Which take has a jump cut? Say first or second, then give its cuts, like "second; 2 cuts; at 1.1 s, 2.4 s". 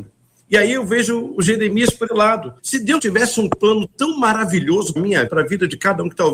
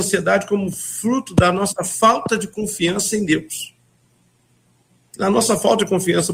first; 5 cuts; at 2.1 s, 2.6 s, 3.0 s, 5.0 s, 5.3 s